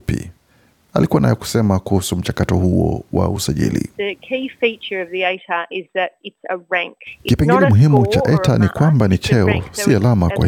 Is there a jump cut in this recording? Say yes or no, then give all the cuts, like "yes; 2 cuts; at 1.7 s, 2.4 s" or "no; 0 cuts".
no; 0 cuts